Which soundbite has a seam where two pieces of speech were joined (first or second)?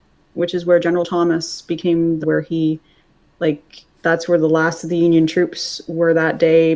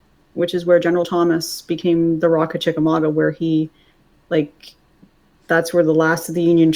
first